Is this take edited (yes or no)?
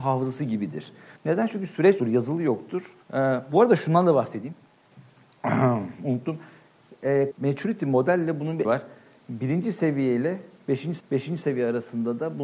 yes